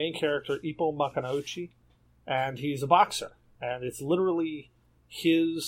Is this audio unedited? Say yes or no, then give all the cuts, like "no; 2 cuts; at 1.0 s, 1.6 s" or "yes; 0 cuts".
yes; 0 cuts